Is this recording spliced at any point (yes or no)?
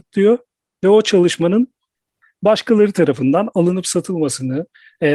no